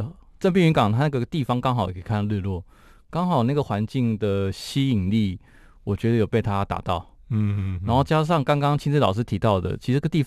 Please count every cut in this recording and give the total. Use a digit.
0